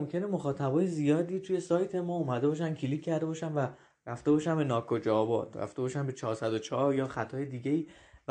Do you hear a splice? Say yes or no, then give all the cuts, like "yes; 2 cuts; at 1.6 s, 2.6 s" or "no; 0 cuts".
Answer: no; 0 cuts